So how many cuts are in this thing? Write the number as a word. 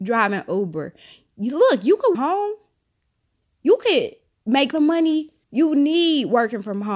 three